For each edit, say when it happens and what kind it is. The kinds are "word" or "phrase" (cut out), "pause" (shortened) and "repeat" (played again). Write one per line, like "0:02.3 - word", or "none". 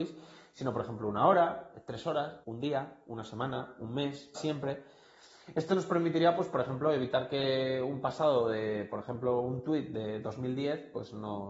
0:02.4 - pause
0:04.3 - word